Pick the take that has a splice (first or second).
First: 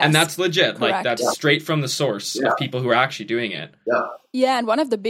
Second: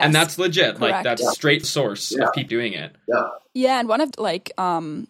second